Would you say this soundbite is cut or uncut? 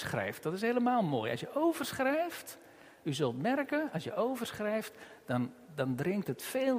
uncut